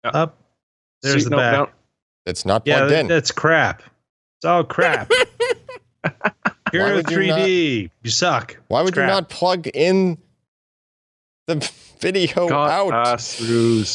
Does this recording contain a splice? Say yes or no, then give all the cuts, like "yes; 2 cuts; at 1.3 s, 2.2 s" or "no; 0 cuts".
no; 0 cuts